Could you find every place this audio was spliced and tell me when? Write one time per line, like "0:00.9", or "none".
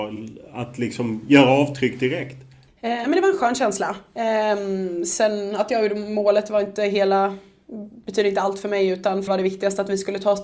0:02.7
0:03.0
0:09.3